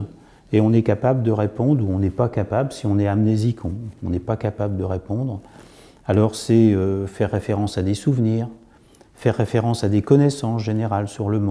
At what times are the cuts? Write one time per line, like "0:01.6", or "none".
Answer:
none